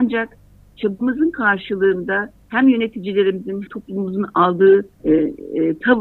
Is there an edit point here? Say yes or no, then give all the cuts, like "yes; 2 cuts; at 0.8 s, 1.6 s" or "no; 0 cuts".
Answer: yes; 3 cuts; at 2.4 s, 3.7 s, 4.9 s